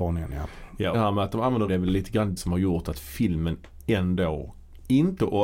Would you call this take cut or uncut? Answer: cut